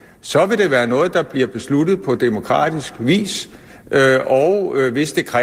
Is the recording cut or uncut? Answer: uncut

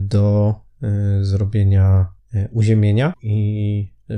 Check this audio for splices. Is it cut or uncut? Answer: uncut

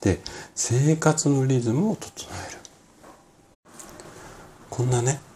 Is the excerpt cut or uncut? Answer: uncut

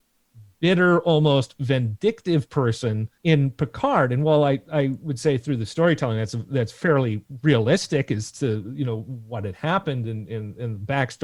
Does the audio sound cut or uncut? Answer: cut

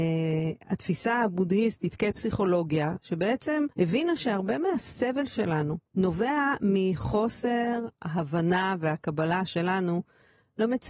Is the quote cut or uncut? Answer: cut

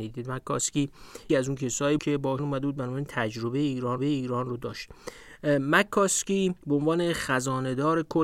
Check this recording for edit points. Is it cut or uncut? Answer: cut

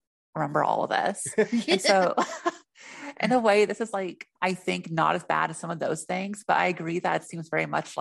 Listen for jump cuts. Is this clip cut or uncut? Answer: cut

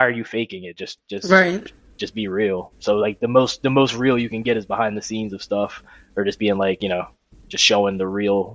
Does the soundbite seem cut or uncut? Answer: uncut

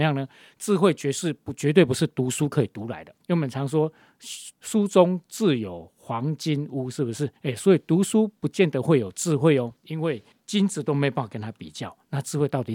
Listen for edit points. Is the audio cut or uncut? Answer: cut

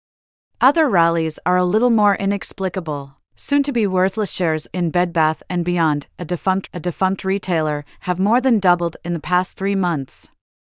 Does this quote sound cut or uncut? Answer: cut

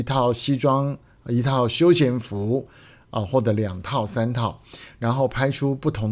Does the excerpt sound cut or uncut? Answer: uncut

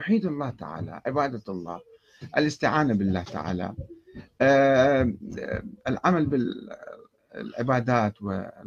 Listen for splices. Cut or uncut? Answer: uncut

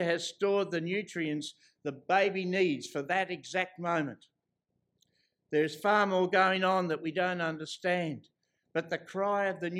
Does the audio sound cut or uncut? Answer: uncut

